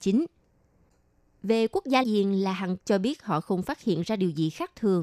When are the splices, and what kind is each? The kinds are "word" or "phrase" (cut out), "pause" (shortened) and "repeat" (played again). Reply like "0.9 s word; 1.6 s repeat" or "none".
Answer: 2.0 s word; 2.8 s word